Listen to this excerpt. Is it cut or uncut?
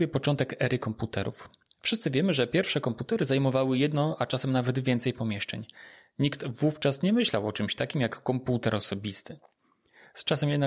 uncut